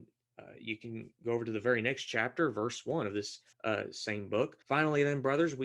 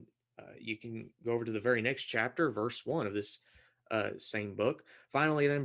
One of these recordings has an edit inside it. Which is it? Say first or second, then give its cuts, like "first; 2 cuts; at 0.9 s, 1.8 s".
first; 2 cuts; at 3.5 s, 4.6 s